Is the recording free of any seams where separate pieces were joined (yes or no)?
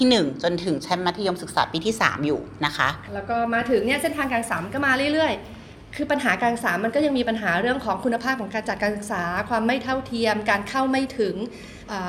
no